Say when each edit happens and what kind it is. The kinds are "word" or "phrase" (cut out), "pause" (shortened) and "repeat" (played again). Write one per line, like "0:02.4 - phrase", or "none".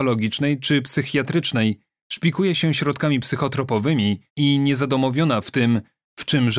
0:04.3 - pause